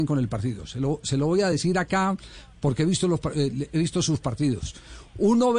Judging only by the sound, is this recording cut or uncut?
uncut